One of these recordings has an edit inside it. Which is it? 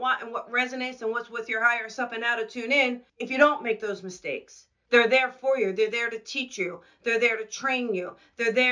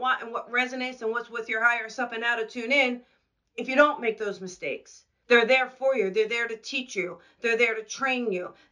first; 1 cut; at 3.1 s

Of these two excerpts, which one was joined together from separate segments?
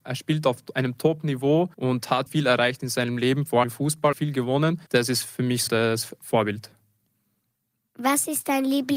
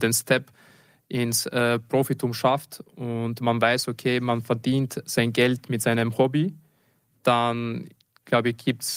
first; 6 cuts; at 1.7 s, 2.3 s, 3.6 s, 4.1 s, 4.9 s, 5.7 s

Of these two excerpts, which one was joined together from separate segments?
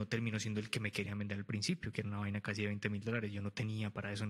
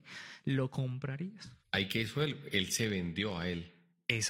second; 1 cut; at 1.6 s

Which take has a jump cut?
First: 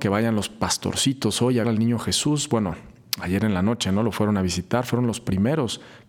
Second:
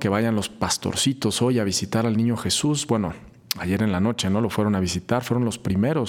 first; 1 cut; at 1.6 s

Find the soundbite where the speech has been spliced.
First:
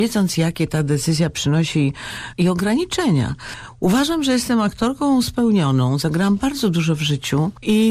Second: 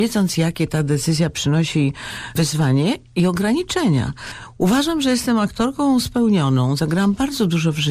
first; 1 cut; at 2.3 s

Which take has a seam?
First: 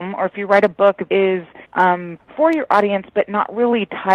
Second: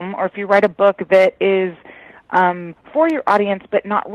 first; 2 cuts; at 1.1 s, 1.6 s

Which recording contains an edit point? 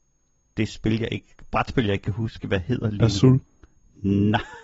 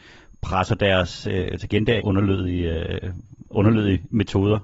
second; 3 cuts; at 1.6 s, 2.0 s, 3.5 s

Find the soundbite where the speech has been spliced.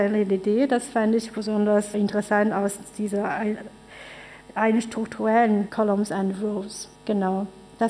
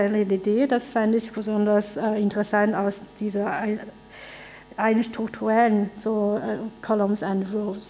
first; 3 cuts; at 1.9 s, 5.7 s, 6.9 s

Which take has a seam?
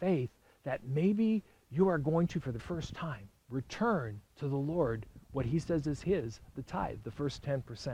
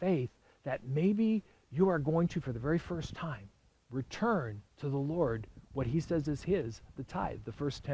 first; 2 cuts; at 2.6 s, 3.4 s

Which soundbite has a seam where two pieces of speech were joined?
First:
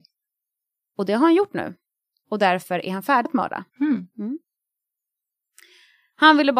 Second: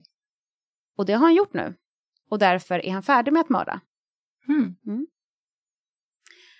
first; 2 cuts; at 3.3 s, 3.7 s

